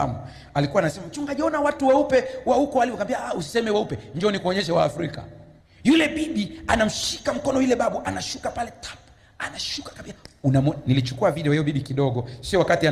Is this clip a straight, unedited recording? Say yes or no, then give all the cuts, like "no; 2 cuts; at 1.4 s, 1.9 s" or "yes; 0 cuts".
yes; 0 cuts